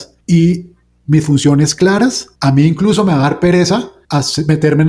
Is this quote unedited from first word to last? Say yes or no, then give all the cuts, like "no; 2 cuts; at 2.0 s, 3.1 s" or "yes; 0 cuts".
yes; 0 cuts